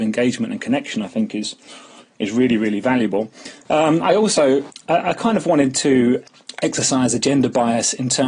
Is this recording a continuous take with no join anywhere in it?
yes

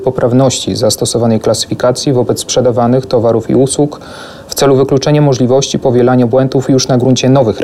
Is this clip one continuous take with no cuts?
yes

